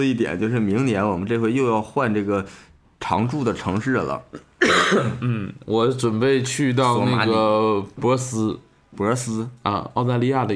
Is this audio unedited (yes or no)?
yes